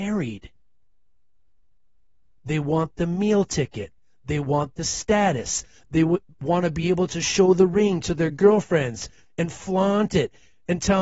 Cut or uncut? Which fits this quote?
uncut